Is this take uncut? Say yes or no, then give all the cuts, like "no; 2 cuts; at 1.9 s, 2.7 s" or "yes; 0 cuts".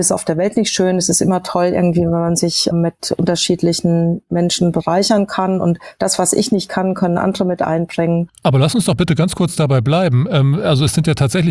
no; 1 cut; at 2.7 s